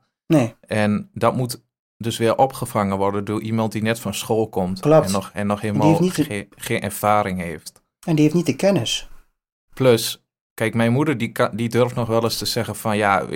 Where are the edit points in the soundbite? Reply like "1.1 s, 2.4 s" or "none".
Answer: none

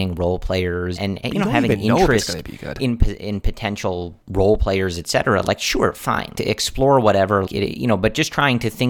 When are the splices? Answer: 1.0 s, 4.2 s, 6.3 s, 7.5 s

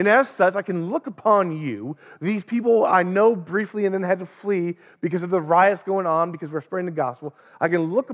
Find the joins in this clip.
none

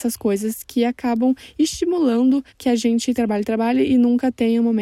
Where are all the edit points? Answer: 2.5 s, 3.1 s

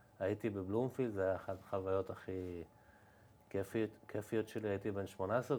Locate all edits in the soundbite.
none

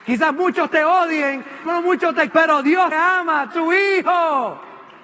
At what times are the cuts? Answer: 1.7 s, 2.3 s, 2.9 s, 3.5 s

